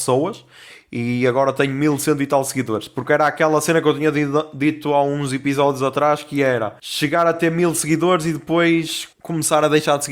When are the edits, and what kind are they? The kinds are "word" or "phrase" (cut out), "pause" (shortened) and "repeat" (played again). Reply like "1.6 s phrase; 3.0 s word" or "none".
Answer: 6.8 s pause; 9.1 s pause